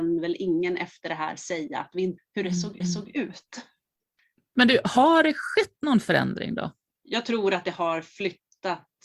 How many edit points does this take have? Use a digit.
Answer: 3